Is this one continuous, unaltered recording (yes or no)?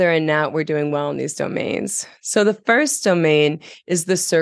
yes